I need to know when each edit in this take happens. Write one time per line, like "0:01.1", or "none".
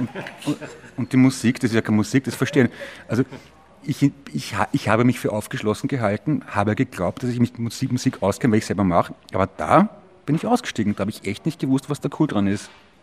none

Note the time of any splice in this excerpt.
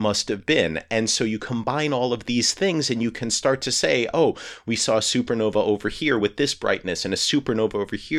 none

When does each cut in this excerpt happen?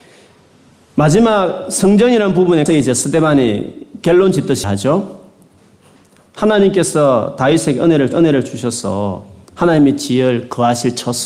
0:02.7
0:04.6
0:08.1

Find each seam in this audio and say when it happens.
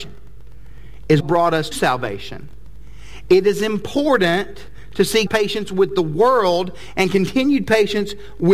0:01.2
0:01.7
0:05.3

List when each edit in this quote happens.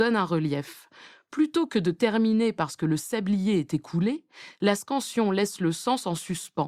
none

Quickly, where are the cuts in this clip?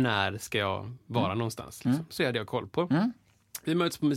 0:02.2

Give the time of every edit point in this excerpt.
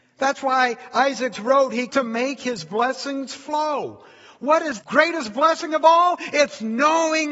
0:01.3
0:01.9
0:04.8

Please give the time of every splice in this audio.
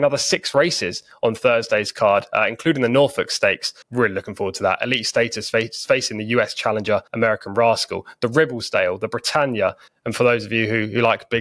0:03.8
0:07.1
0:09.9

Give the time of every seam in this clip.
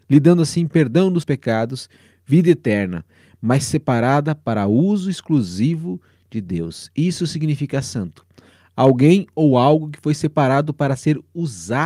0:01.2

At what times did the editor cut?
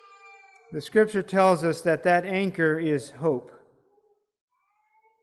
none

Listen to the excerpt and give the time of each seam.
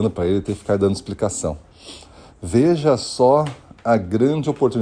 none

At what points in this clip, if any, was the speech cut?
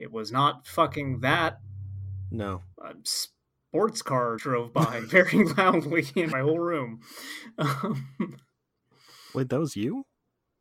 0:02.7
0:04.4
0:06.3

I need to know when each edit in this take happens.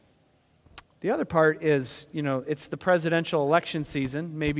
none

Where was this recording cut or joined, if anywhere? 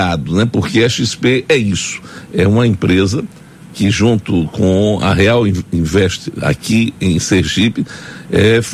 none

